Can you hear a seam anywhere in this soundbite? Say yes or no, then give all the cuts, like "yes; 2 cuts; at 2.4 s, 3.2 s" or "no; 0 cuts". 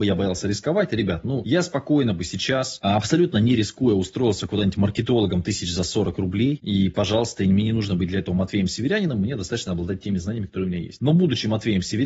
no; 0 cuts